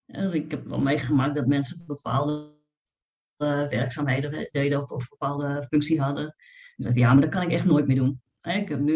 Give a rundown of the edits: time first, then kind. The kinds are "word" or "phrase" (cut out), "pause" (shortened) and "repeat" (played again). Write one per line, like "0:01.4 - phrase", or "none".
none